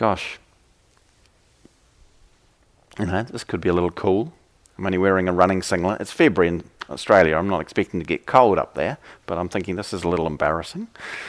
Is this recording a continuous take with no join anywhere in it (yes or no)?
yes